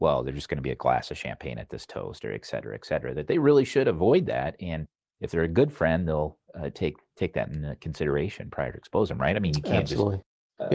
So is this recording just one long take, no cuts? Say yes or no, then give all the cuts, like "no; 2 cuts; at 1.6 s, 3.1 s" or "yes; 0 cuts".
yes; 0 cuts